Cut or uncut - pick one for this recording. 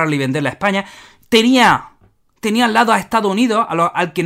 uncut